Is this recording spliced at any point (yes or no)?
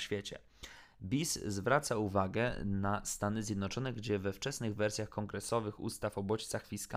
no